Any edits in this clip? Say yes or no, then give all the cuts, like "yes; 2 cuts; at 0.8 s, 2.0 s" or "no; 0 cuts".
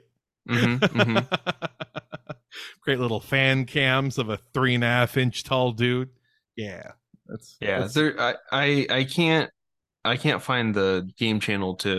no; 0 cuts